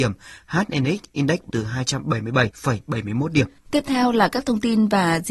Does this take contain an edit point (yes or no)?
yes